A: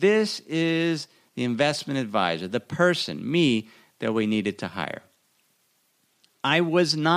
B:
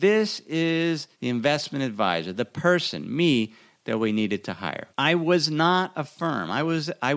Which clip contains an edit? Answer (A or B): B